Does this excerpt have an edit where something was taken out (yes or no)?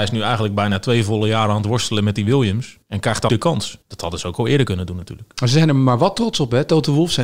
yes